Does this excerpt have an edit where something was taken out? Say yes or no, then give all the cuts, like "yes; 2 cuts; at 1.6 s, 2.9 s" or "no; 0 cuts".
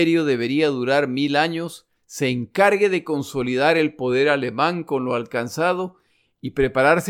yes; 1 cut; at 2.0 s